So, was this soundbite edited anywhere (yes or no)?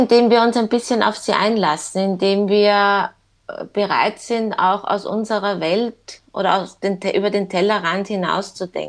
no